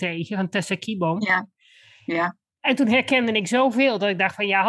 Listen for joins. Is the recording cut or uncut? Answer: uncut